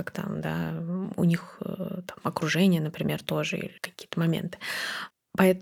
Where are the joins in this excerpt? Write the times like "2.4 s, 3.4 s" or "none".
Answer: 3.8 s